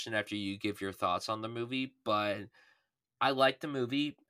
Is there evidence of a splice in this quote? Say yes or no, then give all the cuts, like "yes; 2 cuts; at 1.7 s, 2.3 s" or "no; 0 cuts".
no; 0 cuts